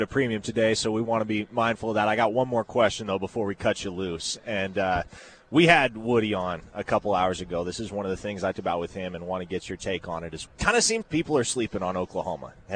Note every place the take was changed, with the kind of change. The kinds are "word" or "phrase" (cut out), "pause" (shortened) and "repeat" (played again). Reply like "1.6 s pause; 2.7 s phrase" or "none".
8.5 s word; 10.5 s word; 11.0 s word